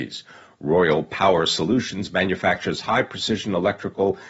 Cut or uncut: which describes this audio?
uncut